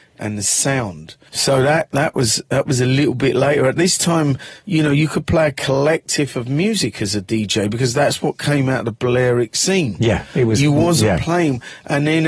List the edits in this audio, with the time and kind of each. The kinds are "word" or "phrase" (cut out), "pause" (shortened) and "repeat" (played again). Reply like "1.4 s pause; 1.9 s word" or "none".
none